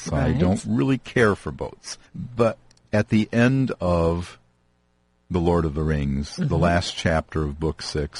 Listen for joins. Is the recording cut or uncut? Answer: cut